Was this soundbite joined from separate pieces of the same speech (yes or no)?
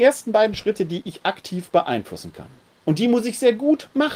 no